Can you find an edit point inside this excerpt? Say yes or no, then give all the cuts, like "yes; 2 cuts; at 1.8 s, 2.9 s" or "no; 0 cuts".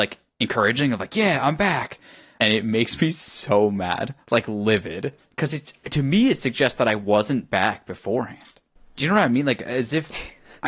yes; 1 cut; at 2.4 s